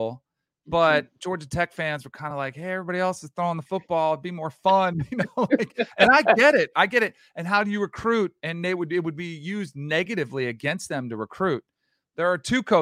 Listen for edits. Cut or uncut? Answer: uncut